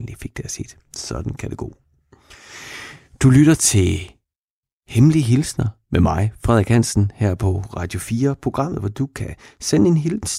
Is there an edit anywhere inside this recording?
no; 0 cuts

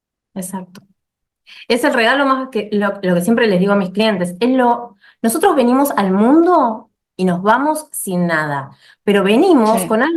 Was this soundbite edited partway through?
no; 0 cuts

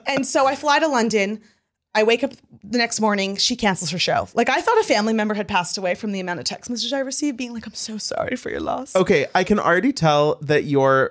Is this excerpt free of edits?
yes; 0 cuts

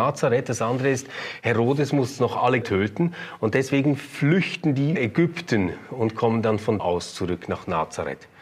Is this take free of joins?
no; 3 cuts; at 2.6 s, 5.0 s, 6.8 s

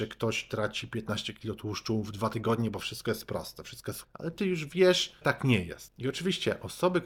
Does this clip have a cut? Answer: yes; 2 cuts; at 4.0 s, 5.2 s

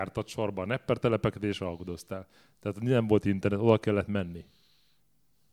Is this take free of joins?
yes; 0 cuts

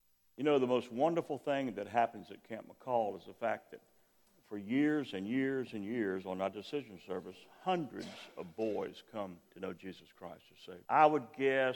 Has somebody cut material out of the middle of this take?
yes; 3 cuts; at 4.3 s, 9.5 s, 10.8 s

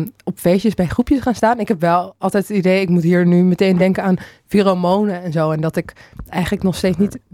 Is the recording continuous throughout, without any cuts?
yes; 0 cuts

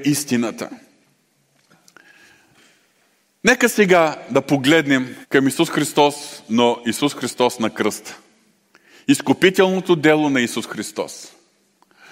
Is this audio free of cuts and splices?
no; 2 cuts; at 5.2 s, 8.6 s

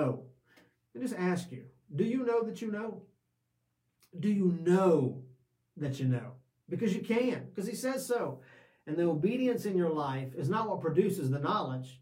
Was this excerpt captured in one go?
yes; 0 cuts

